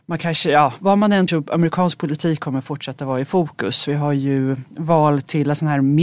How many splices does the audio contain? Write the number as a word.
one